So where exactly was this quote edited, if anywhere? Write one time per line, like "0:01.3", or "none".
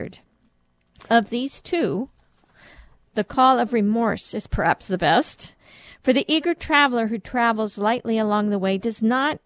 none